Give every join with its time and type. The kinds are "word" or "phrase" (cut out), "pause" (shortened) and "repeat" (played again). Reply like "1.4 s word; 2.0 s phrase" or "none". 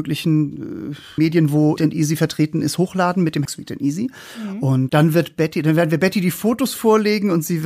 1.2 s word; 1.8 s word; 3.4 s word; 4.9 s word